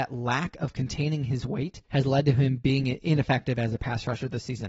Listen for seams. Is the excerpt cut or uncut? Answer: cut